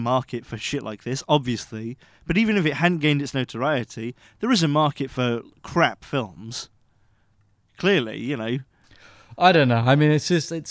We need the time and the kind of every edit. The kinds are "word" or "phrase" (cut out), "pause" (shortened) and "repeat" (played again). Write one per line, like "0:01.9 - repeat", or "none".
none

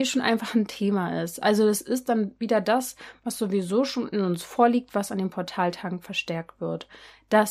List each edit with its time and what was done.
none

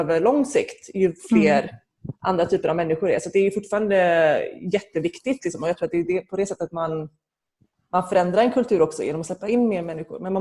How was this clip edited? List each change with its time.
none

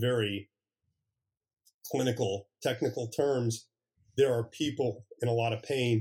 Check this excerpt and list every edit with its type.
none

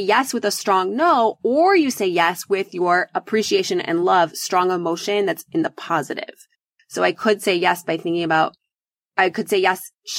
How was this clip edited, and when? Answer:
none

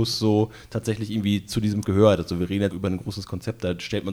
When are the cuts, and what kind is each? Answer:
0:01.8 - word
0:02.7 - word

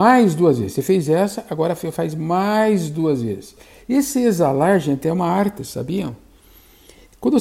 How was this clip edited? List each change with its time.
none

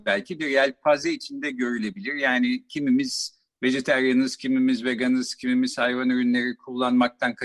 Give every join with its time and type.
none

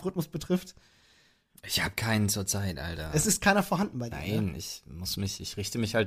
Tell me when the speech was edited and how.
none

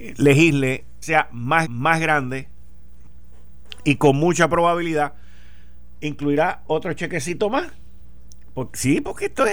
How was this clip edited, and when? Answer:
0:01.0 - phrase
0:01.6 - repeat

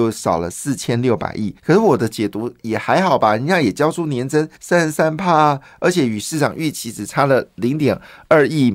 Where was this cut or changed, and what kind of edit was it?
0:01.6 - pause
0:04.5 - pause

